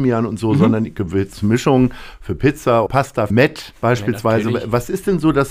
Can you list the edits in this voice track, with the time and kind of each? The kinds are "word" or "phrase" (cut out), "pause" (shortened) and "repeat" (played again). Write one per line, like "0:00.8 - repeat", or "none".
0:02.9 - word
0:03.3 - word
0:03.8 - pause